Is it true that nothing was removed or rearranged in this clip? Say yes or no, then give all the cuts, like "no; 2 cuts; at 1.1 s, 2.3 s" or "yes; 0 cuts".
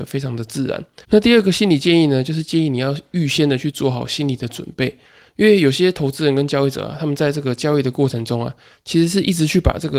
no; 1 cut; at 1.0 s